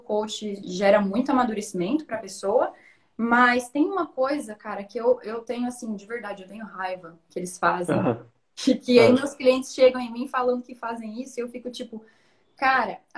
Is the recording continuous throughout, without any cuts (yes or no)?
yes